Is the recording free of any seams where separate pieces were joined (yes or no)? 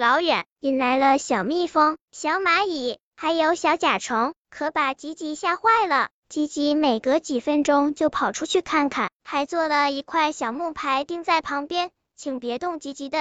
yes